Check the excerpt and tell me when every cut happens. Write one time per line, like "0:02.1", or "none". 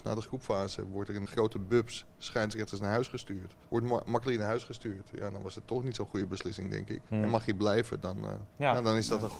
0:01.3
0:03.6
0:07.1
0:08.5